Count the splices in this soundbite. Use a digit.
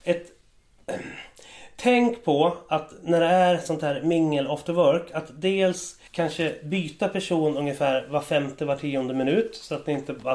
1